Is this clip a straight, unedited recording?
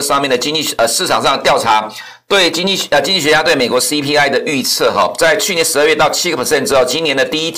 yes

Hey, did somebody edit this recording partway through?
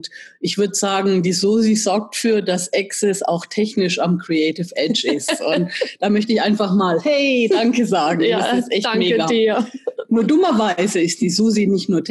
no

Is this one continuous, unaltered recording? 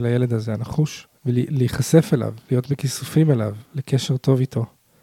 no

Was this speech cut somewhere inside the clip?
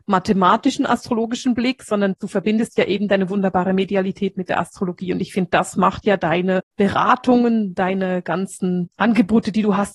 no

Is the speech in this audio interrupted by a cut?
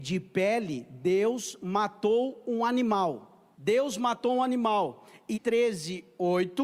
yes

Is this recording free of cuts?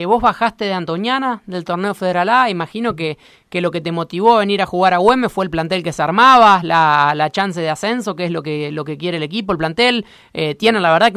yes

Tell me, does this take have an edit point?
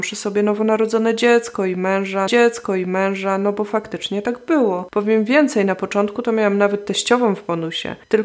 yes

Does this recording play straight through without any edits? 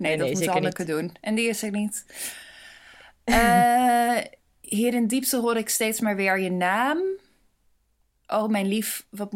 yes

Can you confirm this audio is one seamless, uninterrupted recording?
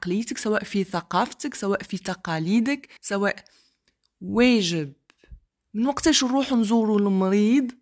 no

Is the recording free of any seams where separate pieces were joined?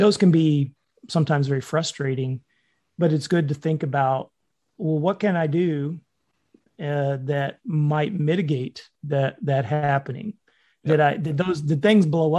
yes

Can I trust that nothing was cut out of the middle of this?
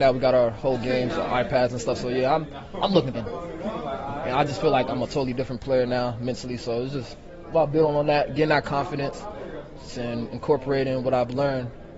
no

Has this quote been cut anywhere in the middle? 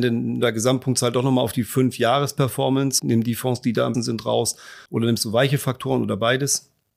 yes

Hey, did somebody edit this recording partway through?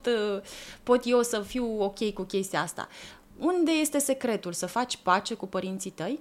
no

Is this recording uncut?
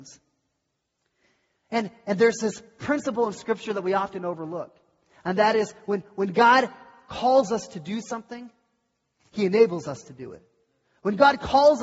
yes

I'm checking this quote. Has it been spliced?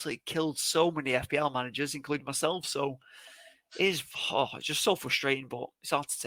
no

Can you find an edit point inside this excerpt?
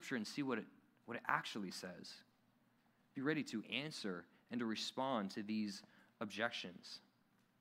no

